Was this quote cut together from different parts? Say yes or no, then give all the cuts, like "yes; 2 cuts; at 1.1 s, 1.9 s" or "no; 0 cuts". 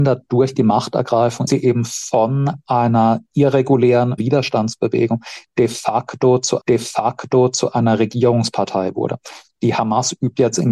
yes; 3 cuts; at 1.5 s, 4.2 s, 6.6 s